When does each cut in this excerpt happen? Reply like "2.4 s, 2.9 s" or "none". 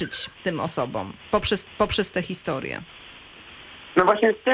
1.6 s